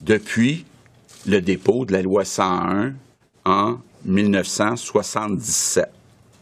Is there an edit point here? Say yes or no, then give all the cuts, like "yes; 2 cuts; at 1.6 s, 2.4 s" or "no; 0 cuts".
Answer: no; 0 cuts